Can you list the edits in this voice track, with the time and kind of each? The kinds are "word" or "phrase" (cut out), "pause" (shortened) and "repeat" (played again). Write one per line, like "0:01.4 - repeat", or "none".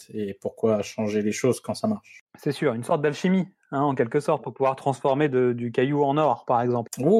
none